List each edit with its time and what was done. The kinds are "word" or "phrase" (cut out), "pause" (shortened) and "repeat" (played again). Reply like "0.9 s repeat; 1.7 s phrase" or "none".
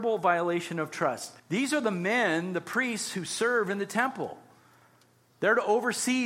1.4 s pause